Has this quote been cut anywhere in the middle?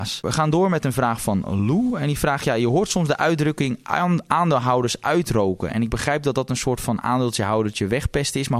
no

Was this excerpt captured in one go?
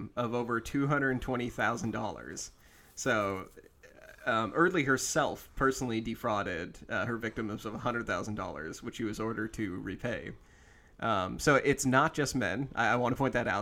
yes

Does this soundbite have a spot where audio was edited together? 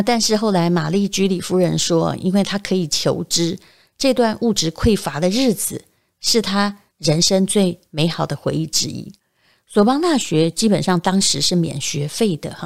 no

